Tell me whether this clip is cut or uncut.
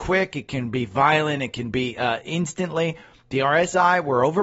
uncut